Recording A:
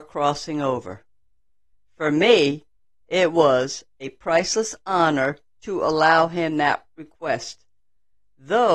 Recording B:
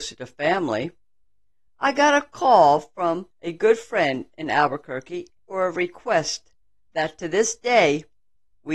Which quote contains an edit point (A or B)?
B